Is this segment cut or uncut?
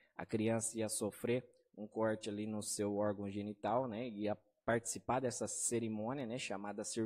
uncut